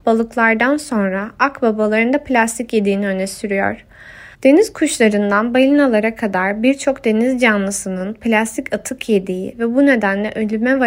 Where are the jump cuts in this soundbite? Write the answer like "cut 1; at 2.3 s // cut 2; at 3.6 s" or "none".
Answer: cut 1; at 4.3 s